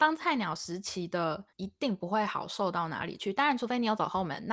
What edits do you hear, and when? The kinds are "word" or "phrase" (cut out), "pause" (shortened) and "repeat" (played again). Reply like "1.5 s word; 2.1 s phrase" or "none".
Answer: 1.5 s pause